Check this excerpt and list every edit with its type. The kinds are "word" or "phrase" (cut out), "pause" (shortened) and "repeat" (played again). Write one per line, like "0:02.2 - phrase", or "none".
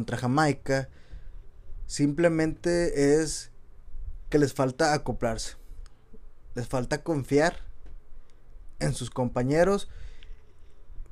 none

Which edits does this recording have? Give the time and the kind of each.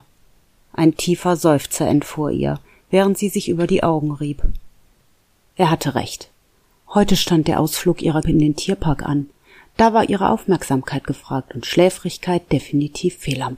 0:08.2 - word

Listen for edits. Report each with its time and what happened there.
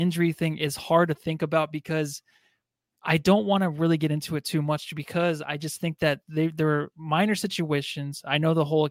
none

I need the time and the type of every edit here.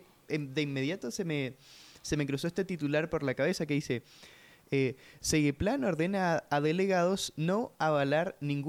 none

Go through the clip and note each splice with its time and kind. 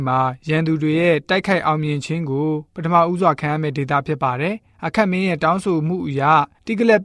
0:02.7 - pause

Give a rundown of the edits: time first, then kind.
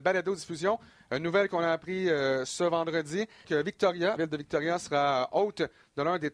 0:03.4 - word
0:04.2 - word

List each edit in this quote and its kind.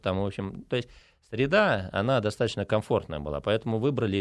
none

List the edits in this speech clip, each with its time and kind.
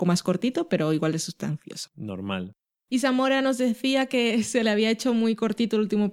none

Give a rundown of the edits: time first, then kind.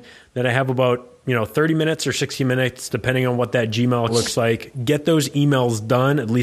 0:04.1 - word

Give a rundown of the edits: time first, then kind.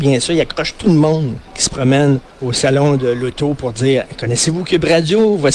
0:01.5 - pause
0:02.3 - pause

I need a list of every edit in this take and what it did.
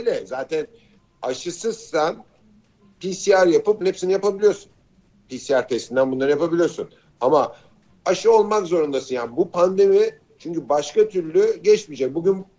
0:03.8 - word

